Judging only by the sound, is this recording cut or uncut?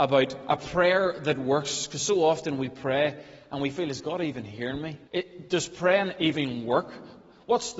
cut